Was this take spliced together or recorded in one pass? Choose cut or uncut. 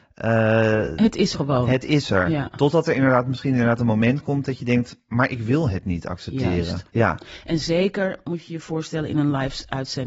cut